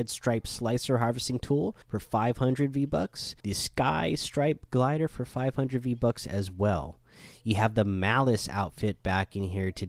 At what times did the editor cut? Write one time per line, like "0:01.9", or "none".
0:01.8
0:03.4

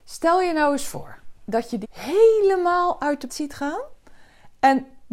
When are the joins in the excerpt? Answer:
0:01.4
0:01.8
0:03.3

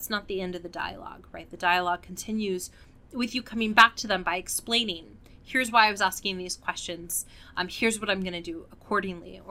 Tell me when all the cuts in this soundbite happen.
none

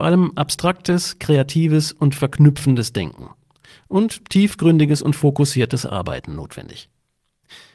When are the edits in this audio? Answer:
none

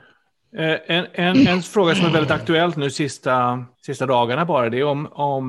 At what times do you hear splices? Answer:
0:03.7

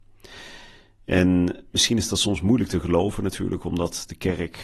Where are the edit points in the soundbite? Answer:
none

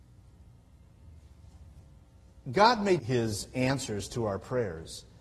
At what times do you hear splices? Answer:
0:03.0

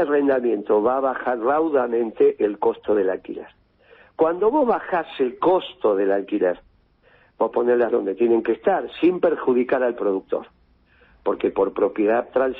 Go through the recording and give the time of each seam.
0:07.5
0:07.9

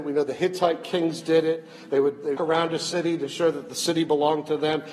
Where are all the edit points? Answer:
0:02.4

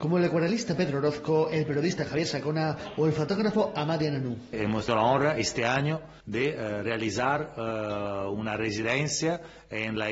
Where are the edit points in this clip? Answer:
0:04.9
0:06.2

